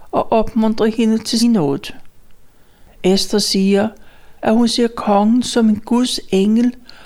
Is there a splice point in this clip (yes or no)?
yes